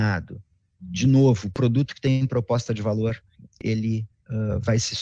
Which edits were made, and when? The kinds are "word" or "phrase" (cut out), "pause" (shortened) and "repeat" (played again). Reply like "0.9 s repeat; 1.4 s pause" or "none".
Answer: none